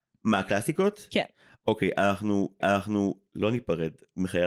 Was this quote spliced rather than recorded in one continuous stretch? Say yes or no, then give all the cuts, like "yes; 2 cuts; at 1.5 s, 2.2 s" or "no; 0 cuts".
yes; 1 cut; at 2.6 s